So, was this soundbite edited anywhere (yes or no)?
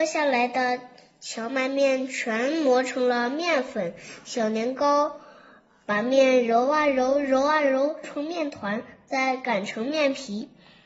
yes